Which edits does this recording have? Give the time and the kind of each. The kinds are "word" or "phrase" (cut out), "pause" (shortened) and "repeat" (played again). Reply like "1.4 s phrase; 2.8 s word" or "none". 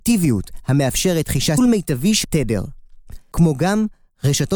1.6 s phrase; 2.2 s word